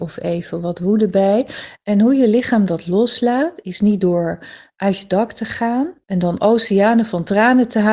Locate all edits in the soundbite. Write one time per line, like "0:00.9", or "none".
0:06.0